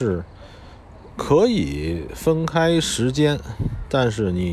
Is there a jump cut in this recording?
yes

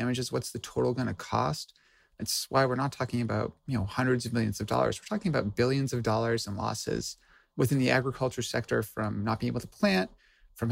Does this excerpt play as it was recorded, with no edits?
yes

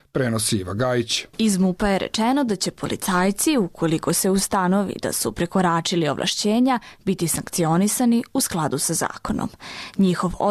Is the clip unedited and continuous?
no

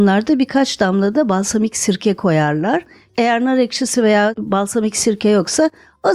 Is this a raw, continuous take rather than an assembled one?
yes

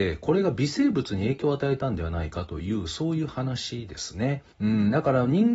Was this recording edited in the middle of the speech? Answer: yes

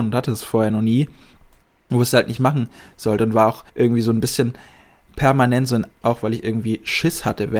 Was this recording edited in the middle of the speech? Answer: yes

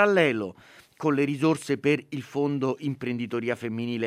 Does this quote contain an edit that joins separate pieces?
no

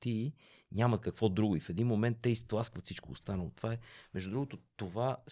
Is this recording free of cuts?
yes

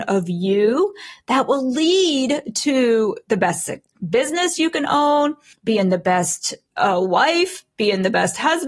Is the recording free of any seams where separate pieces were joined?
yes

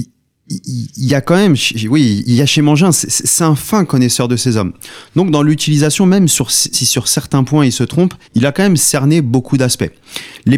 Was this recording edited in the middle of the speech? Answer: yes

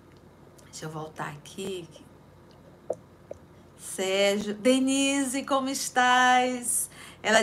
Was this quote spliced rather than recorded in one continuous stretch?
no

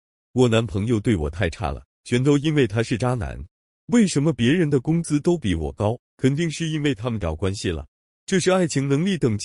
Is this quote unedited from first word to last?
yes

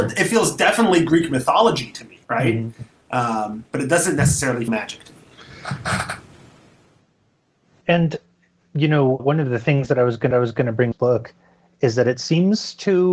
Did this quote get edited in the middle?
yes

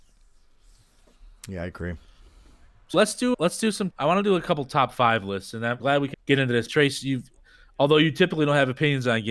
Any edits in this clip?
yes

